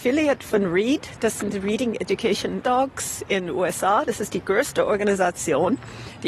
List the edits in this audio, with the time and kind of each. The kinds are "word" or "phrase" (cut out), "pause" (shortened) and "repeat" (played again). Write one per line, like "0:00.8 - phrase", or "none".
0:02.6 - word